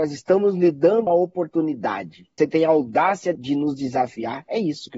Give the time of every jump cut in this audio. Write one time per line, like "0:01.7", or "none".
0:01.1
0:02.4
0:03.4